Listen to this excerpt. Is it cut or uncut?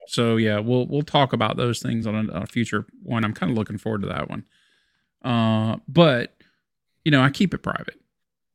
uncut